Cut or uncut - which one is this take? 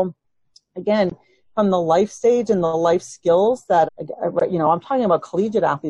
cut